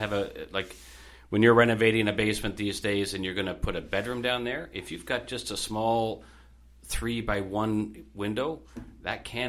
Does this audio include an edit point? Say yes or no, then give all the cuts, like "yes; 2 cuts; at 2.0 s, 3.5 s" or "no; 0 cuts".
no; 0 cuts